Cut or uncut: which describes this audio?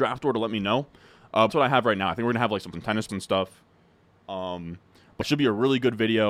cut